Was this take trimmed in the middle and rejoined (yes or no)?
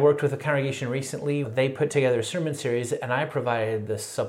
yes